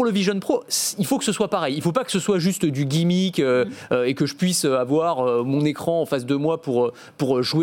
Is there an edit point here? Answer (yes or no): no